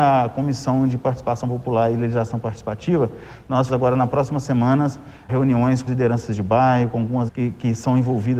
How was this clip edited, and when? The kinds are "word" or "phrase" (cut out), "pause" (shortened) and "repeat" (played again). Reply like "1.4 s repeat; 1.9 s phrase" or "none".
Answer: 3.7 s word; 5.3 s word; 5.9 s word; 7.3 s word